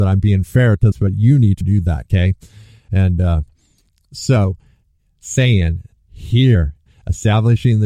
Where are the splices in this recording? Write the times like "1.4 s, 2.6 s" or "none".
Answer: 0.9 s, 1.6 s